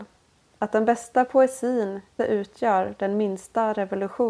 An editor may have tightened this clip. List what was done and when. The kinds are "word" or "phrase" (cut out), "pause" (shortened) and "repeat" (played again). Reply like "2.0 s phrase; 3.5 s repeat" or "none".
2.2 s word